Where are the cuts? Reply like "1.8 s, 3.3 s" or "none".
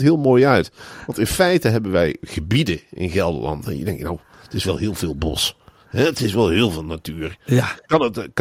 none